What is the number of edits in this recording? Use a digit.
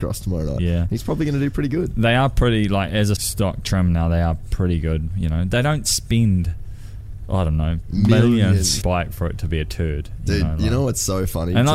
2